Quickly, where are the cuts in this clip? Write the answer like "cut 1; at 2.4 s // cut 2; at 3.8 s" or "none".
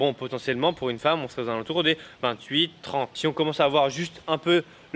none